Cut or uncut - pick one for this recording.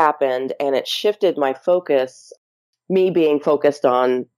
uncut